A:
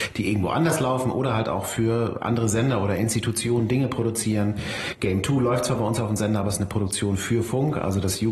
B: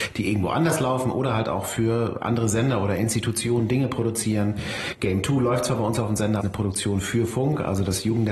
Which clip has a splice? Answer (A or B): B